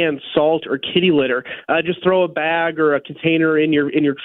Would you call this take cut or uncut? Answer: uncut